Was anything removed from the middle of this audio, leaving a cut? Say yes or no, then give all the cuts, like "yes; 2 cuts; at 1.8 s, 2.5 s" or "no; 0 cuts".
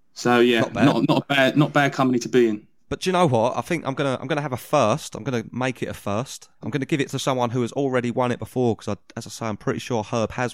yes; 2 cuts; at 2.8 s, 6.5 s